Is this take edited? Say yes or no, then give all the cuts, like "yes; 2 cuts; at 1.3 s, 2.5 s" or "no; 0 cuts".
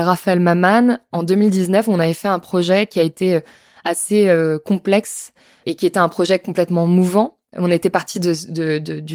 no; 0 cuts